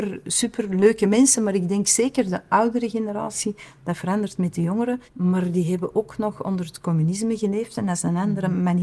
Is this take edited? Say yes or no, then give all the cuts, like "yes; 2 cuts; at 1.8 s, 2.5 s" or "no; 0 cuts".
yes; 1 cut; at 5.1 s